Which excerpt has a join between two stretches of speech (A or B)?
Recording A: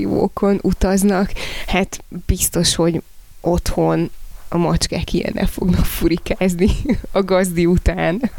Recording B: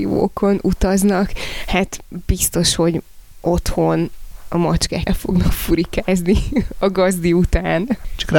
B